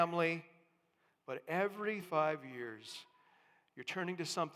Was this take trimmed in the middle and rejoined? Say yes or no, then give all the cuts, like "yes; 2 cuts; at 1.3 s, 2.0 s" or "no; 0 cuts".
yes; 1 cut; at 2.0 s